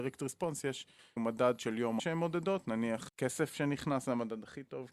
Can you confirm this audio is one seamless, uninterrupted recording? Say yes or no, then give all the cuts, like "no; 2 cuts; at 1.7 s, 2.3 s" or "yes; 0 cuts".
no; 3 cuts; at 1.2 s, 2.0 s, 3.1 s